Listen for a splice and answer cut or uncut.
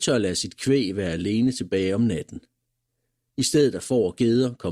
uncut